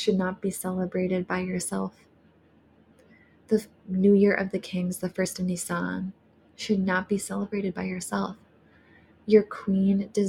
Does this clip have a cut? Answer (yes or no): no